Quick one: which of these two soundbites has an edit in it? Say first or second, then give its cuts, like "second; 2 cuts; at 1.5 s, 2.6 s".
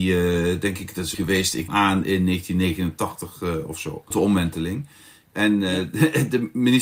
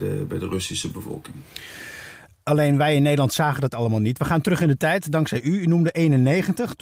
first; 3 cuts; at 1.1 s, 1.7 s, 4.1 s